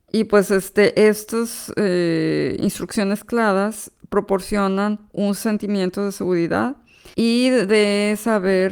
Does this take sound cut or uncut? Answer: cut